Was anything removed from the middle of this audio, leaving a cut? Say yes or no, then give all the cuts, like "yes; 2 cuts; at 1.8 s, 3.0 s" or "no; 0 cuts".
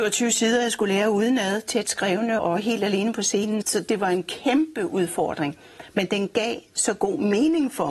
yes; 2 cuts; at 2.4 s, 3.6 s